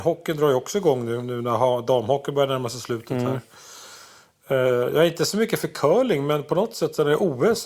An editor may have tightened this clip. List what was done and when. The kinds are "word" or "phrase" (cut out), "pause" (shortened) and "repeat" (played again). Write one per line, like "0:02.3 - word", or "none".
none